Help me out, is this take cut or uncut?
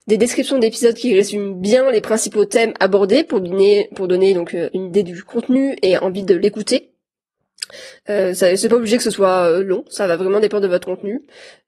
uncut